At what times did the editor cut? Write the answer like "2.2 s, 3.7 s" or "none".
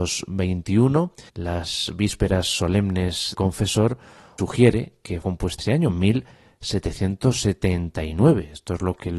1.3 s, 3.3 s, 4.4 s, 5.2 s, 5.6 s